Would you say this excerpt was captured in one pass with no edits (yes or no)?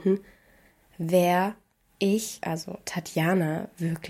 yes